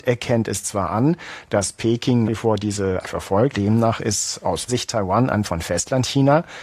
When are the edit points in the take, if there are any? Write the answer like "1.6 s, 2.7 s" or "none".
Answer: 2.3 s, 3.0 s, 3.5 s, 4.7 s, 5.4 s